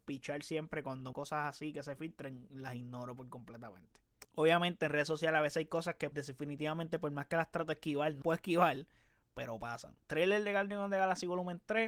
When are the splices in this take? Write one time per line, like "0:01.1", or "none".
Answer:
0:01.1
0:06.1
0:08.2
0:10.0